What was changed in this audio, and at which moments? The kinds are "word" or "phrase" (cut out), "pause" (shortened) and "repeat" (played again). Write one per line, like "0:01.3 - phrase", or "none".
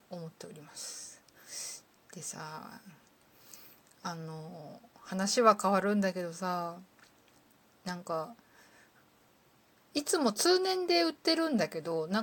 none